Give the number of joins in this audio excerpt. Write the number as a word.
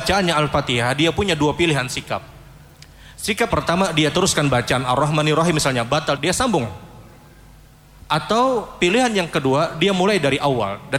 two